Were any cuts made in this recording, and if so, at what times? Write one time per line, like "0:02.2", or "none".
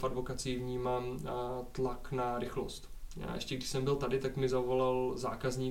none